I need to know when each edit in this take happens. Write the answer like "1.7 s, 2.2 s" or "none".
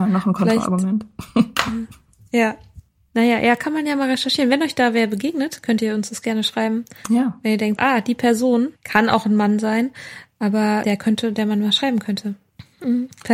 7.8 s, 8.8 s, 10.8 s